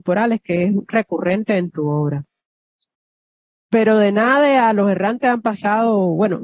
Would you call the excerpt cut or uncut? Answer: uncut